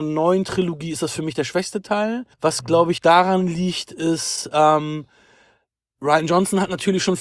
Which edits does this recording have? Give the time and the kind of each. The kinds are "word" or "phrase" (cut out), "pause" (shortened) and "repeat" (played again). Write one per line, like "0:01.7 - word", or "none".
0:02.3 - pause
0:03.0 - word

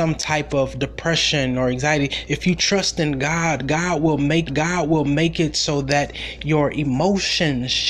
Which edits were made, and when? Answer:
0:04.5 - repeat

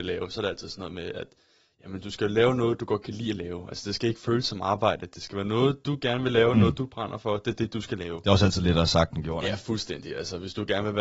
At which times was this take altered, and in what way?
none

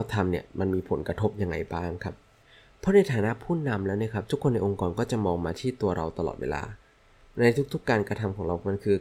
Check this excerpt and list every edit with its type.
none

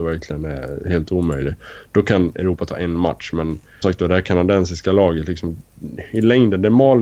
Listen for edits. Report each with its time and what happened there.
0:03.8 - word

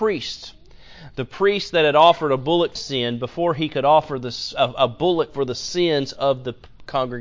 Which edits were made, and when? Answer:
0:02.8 - phrase

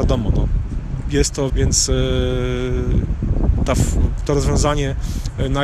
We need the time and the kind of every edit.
0:01.5 - phrase

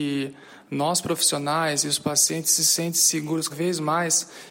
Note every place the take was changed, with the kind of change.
0:03.5 - word

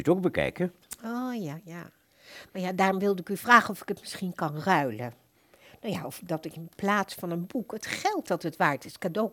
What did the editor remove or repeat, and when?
none

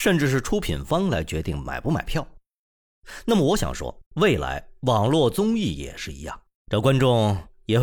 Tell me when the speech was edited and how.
0:04.1 - pause
0:06.6 - pause

